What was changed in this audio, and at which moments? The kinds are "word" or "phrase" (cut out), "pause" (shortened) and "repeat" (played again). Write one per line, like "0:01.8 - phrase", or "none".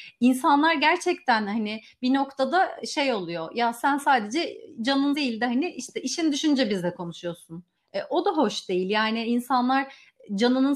0:05.1 - word
0:07.8 - pause